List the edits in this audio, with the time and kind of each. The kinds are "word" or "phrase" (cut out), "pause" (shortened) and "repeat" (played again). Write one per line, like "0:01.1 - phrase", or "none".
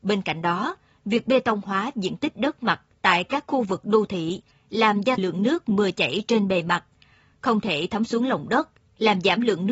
0:05.2 - word